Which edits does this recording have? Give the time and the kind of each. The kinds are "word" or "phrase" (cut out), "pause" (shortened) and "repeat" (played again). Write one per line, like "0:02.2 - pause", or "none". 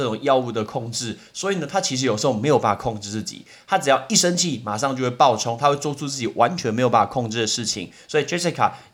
none

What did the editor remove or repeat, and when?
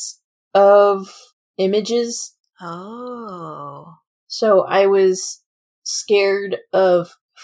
none

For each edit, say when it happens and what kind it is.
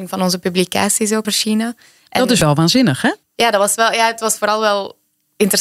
0:01.2 - word
0:03.2 - pause

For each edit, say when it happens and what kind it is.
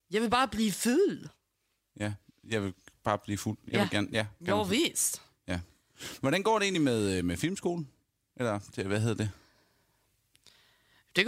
none

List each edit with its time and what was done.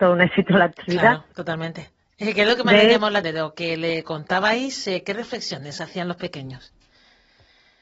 0:03.2 - word

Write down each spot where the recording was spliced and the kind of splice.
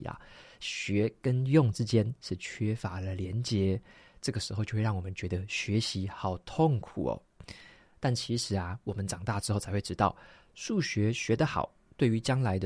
none

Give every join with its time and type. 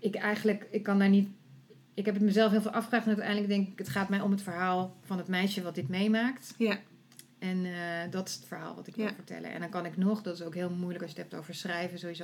none

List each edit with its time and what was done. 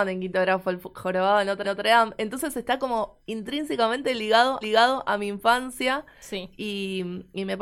0:01.6 - repeat
0:03.2 - word
0:04.6 - repeat

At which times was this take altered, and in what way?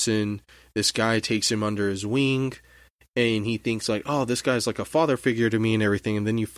none

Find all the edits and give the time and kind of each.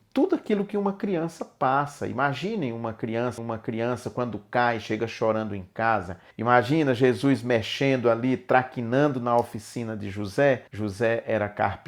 0:03.4 - repeat
0:06.3 - pause
0:10.7 - pause

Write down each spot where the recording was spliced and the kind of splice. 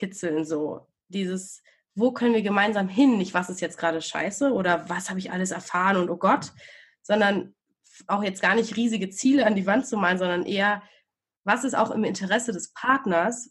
none

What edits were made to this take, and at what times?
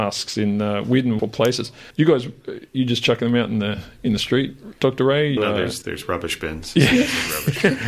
0:01.2 - word
0:01.9 - pause
0:02.7 - pause
0:05.4 - word
0:05.8 - word

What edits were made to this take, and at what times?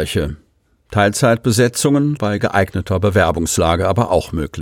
0:02.2 - word

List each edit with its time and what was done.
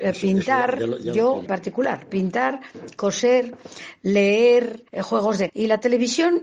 0:01.5 - word
0:04.9 - pause
0:05.5 - word

